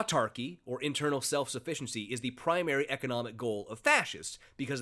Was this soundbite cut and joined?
no; 0 cuts

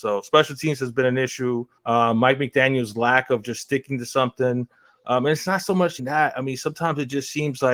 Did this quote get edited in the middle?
yes; 2 cuts; at 1.8 s, 6.0 s

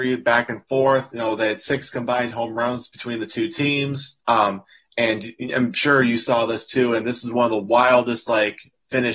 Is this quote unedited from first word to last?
no; 1 cut; at 4.2 s

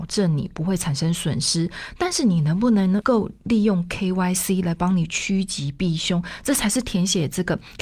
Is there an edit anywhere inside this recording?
no; 0 cuts

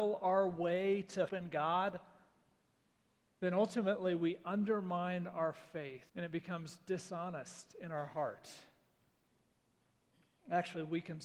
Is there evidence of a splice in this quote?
yes; 2 cuts; at 1.3 s, 6.1 s

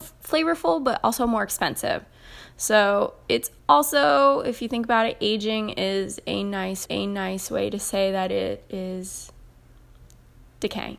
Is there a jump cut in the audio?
yes; 2 cuts; at 3.6 s, 6.8 s

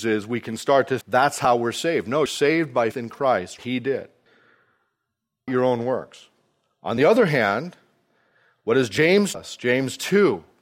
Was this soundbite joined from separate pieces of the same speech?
yes; 6 cuts; at 1.0 s, 2.3 s, 2.9 s, 3.6 s, 5.5 s, 9.3 s

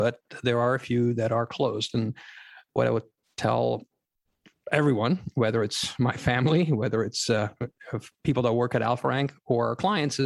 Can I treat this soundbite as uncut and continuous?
yes; 0 cuts

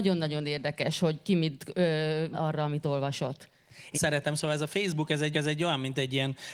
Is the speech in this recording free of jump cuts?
no; 3 cuts; at 2.3 s, 3.9 s, 5.3 s

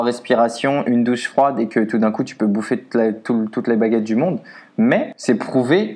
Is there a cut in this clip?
no; 0 cuts

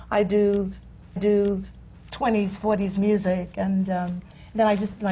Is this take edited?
yes; 1 cut; at 1.2 s

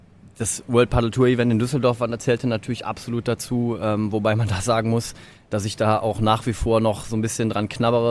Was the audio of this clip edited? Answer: no; 0 cuts

